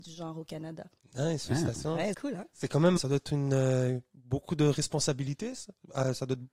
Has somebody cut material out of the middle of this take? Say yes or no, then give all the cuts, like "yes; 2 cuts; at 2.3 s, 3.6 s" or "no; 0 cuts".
yes; 2 cuts; at 2.1 s, 3.0 s